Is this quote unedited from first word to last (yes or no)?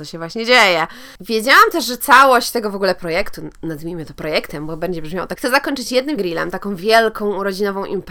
no